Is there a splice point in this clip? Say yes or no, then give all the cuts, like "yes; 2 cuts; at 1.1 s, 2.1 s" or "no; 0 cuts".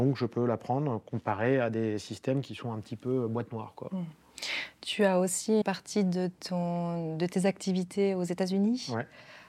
yes; 1 cut; at 5.6 s